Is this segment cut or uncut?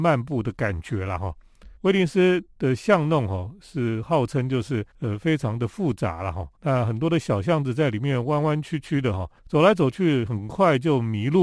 cut